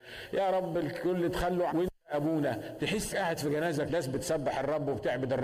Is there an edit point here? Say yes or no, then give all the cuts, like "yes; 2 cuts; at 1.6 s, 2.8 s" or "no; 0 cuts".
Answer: yes; 3 cuts; at 1.7 s, 3.1 s, 3.9 s